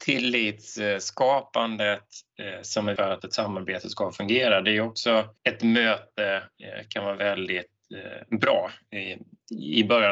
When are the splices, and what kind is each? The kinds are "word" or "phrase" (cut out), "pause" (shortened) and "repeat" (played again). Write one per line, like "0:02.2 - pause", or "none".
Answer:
0:03.0 - word
0:05.4 - pause

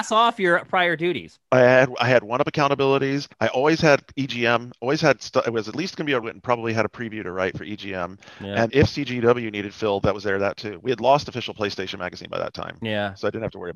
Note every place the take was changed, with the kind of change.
0:01.4 - pause
0:03.3 - pause
0:06.2 - phrase
0:08.7 - word

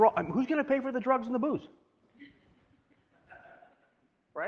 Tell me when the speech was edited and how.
none

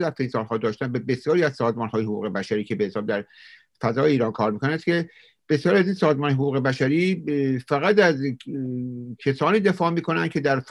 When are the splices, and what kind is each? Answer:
none

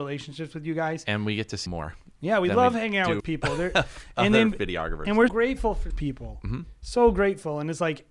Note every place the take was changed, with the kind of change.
0:01.7 - word
0:03.2 - word
0:05.3 - word
0:05.9 - word

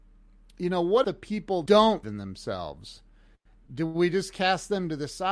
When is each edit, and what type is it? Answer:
0:01.0 - word
0:01.7 - word
0:02.0 - word

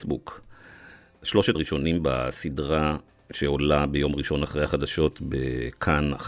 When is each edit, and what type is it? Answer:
0:01.5 - word
0:04.4 - word

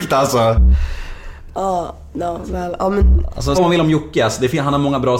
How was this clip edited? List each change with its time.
0:03.5 - word

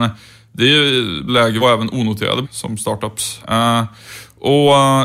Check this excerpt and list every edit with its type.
0:01.3 - phrase
0:01.6 - phrase
0:02.4 - word
0:03.4 - word

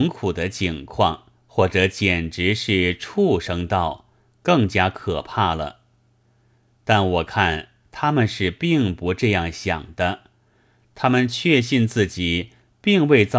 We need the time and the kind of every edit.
0:01.4 - pause

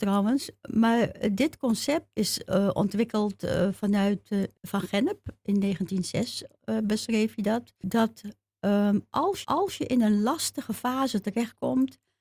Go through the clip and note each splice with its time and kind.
0:04.6 - pause
0:09.4 - repeat

